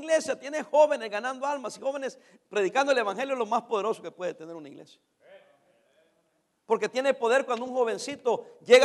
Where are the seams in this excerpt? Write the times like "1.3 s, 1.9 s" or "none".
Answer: none